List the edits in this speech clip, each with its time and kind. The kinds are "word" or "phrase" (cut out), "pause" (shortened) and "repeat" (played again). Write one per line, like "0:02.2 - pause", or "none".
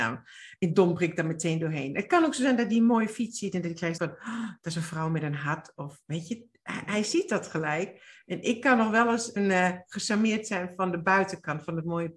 0:04.0 - word
0:09.4 - word